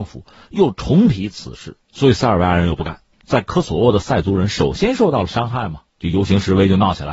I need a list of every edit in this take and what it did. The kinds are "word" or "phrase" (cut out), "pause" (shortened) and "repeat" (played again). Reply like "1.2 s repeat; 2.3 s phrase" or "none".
1.8 s pause; 5.9 s pause